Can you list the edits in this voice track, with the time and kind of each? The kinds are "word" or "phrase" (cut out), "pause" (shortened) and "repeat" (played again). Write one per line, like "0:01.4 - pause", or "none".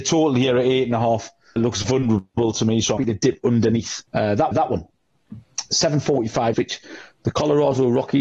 0:01.6 - word
0:03.0 - word
0:04.1 - pause
0:04.5 - repeat
0:06.5 - phrase